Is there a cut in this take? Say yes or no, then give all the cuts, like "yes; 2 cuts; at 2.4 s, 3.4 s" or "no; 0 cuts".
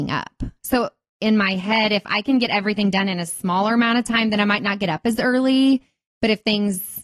no; 0 cuts